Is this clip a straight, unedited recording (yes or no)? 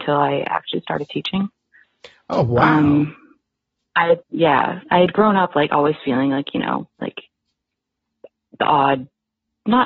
no